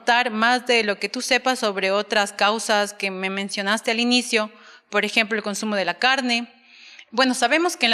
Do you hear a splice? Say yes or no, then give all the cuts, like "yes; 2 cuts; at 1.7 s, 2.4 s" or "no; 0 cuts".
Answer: no; 0 cuts